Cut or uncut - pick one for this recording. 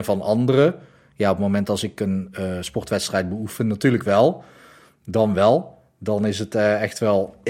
uncut